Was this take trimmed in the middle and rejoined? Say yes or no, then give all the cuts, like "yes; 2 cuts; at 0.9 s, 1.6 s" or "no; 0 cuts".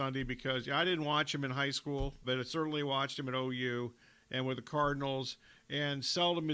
yes; 1 cut; at 2.2 s